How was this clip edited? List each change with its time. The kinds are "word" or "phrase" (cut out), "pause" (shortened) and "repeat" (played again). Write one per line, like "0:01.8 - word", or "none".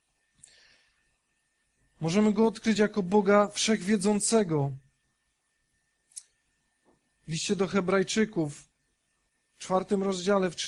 none